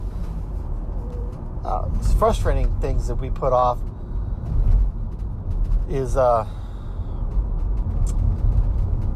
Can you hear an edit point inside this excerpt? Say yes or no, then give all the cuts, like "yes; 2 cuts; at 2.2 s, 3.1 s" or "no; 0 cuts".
no; 0 cuts